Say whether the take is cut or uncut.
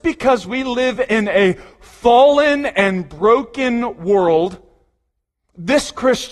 uncut